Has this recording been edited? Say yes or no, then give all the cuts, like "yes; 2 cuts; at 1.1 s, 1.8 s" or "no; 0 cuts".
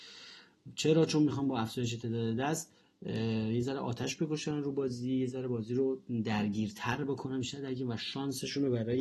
yes; 1 cut; at 2.8 s